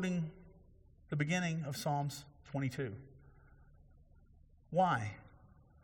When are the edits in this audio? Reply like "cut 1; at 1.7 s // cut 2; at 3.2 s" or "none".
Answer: none